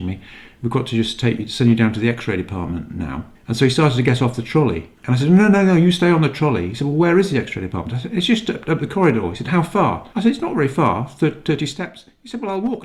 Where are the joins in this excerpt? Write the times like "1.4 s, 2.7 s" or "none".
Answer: 3.3 s, 5.0 s, 10.1 s